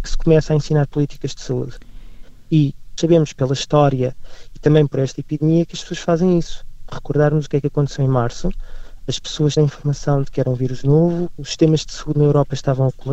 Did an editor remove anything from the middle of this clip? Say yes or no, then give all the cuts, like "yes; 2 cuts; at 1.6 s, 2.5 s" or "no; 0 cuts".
yes; 3 cuts; at 3.0 s, 9.6 s, 11.4 s